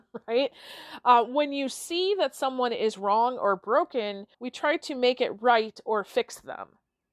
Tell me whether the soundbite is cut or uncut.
cut